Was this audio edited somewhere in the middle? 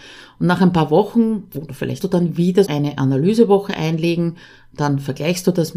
yes; 2 cuts; at 2.0 s, 2.7 s

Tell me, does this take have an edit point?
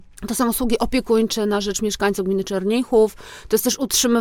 no; 0 cuts

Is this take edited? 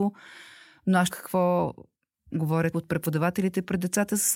yes; 2 cuts; at 1.1 s, 2.7 s

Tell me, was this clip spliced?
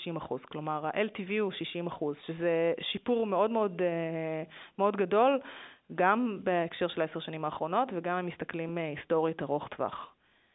no; 0 cuts

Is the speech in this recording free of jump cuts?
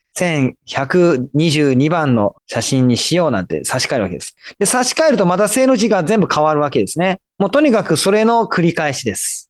no; 1 cut; at 2.4 s

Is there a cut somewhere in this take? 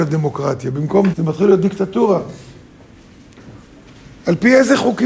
yes; 1 cut; at 1.1 s

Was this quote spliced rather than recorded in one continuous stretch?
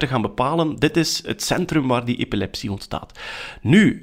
no; 0 cuts

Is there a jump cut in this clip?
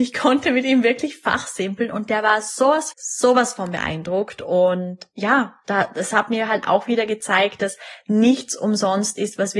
yes; 1 cut; at 2.9 s

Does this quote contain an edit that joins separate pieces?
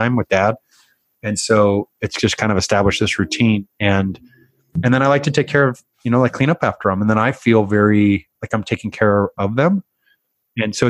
no; 0 cuts

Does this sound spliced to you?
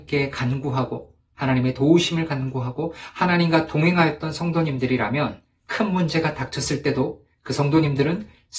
no; 0 cuts

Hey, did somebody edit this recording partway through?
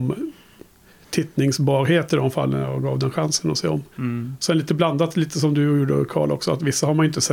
yes; 1 cut; at 3.9 s

